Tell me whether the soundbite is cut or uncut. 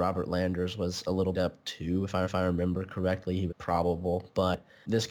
cut